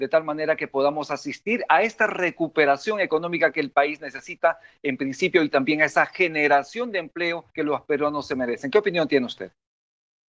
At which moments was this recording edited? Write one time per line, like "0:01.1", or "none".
0:07.5